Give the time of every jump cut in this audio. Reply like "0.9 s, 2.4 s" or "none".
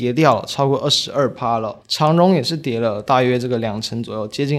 1.8 s